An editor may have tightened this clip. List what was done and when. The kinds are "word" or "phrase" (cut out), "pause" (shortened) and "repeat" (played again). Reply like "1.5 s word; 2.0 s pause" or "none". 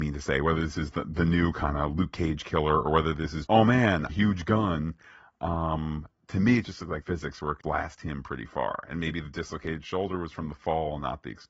3.5 s word; 4.1 s phrase; 6.1 s pause; 7.0 s phrase; 7.6 s word